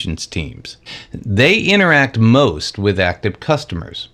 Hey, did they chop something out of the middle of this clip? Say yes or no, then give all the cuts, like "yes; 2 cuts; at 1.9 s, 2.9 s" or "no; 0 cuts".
no; 0 cuts